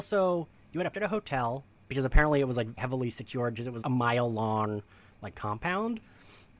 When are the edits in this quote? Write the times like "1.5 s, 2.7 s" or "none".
0.9 s, 2.8 s, 3.8 s